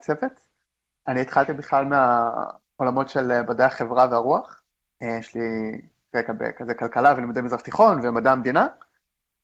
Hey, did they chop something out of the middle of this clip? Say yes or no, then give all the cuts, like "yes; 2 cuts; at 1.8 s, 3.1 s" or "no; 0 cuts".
no; 0 cuts